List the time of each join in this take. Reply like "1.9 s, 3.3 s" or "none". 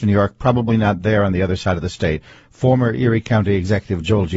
none